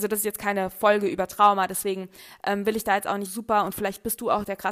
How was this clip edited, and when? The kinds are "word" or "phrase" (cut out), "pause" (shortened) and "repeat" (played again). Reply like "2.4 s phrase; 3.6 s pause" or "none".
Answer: 3.3 s word